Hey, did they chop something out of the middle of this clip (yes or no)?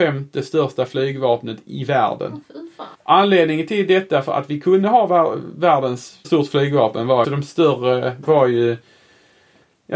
yes